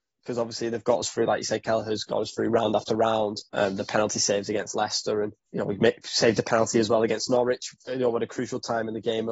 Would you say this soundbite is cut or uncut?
cut